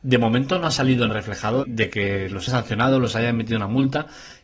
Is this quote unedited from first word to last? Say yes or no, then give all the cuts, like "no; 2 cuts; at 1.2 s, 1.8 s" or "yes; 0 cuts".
no; 3 cuts; at 1.1 s, 1.6 s, 2.5 s